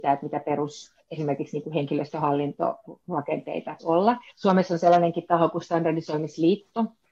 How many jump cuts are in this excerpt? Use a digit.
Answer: 4